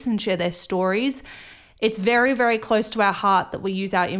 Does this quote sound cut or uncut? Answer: uncut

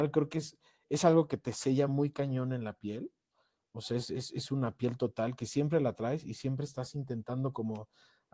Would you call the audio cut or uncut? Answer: uncut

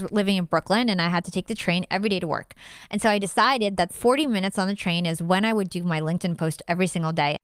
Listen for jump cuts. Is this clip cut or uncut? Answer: cut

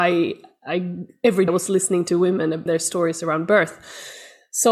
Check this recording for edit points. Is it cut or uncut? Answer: cut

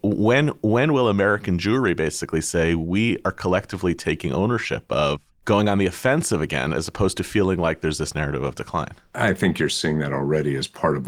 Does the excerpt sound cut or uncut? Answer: cut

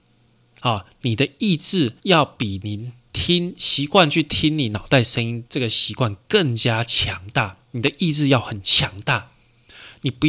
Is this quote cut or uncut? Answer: cut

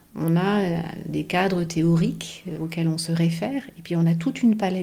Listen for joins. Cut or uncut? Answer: uncut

